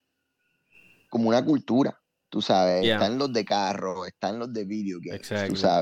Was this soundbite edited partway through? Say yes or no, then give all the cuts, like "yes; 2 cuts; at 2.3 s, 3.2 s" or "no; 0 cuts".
no; 0 cuts